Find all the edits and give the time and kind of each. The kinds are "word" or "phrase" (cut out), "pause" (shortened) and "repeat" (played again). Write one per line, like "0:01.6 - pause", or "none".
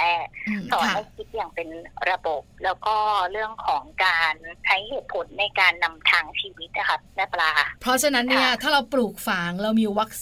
0:07.1 - pause
0:07.8 - pause